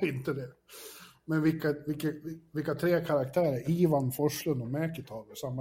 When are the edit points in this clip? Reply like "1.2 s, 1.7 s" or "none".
none